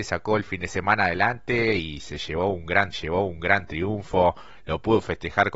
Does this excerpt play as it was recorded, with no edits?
no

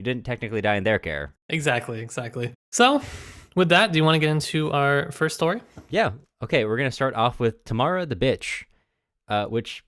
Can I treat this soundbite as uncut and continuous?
yes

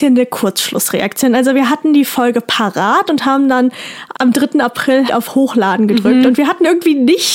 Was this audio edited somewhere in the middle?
yes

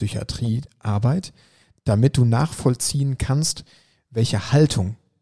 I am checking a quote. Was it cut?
no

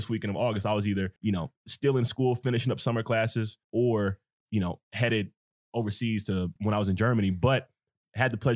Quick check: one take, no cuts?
no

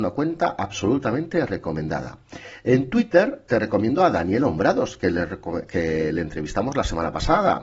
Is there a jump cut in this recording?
no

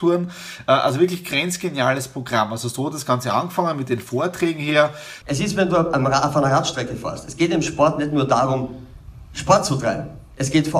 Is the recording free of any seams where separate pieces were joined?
yes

